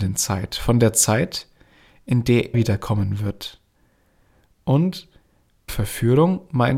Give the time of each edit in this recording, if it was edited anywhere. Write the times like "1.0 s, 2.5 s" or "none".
2.5 s, 5.7 s